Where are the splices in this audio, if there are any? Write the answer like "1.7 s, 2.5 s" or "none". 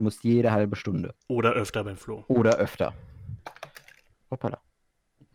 1.2 s